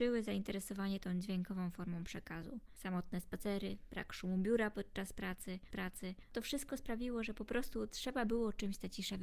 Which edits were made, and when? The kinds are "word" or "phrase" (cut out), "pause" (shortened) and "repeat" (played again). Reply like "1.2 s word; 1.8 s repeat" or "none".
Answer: 5.7 s repeat